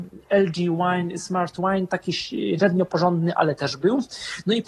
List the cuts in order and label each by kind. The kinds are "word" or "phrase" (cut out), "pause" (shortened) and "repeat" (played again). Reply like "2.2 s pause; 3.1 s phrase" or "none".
none